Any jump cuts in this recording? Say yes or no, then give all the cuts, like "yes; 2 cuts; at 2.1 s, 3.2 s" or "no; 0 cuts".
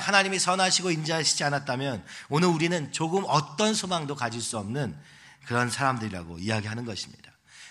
no; 0 cuts